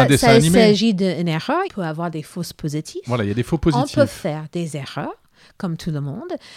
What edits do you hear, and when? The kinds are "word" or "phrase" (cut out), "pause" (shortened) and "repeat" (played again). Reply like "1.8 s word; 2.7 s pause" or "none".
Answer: 1.6 s word